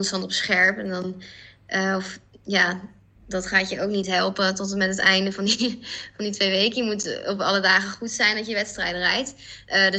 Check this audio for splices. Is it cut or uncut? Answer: uncut